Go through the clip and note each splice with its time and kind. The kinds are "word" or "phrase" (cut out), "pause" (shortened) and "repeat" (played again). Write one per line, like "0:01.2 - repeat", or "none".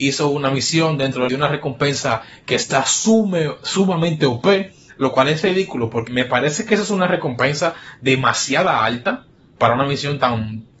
0:01.3 - phrase
0:04.9 - pause
0:06.1 - word